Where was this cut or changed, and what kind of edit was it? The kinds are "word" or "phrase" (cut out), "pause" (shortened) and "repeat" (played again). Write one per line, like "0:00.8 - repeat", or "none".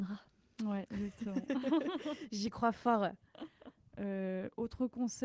none